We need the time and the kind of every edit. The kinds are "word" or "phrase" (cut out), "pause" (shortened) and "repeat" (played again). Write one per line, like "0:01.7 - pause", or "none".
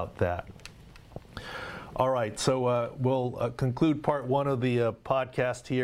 none